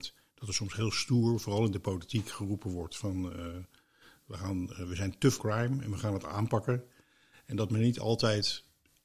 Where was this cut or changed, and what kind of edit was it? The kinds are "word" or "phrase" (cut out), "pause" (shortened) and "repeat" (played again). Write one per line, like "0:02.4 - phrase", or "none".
0:05.4 - word